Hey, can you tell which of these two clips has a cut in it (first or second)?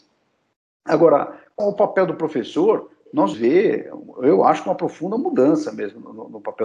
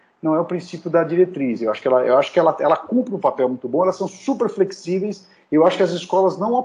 first